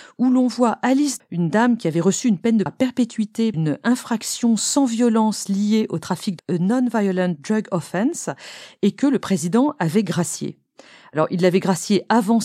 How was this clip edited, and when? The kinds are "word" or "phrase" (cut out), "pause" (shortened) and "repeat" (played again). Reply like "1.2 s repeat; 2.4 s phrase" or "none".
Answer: 1.2 s word; 2.7 s word; 3.5 s word; 6.4 s word